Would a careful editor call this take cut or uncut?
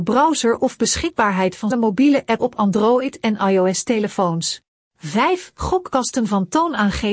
cut